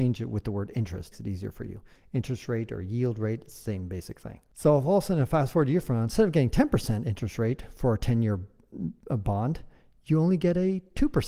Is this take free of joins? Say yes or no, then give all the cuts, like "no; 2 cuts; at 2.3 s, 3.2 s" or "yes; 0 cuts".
no; 1 cut; at 1.1 s